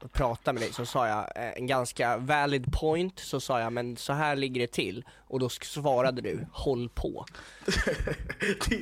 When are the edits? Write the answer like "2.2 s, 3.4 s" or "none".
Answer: none